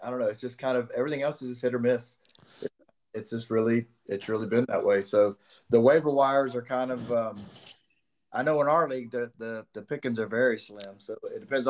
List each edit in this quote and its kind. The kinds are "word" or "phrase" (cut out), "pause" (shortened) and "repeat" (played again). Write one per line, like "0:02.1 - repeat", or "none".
none